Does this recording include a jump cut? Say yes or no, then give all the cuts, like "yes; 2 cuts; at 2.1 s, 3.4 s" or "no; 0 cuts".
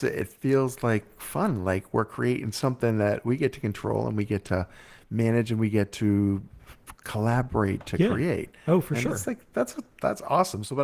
no; 0 cuts